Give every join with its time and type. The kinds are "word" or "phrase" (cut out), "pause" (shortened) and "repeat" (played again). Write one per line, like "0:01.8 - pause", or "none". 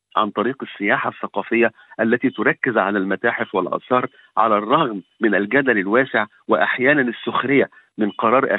none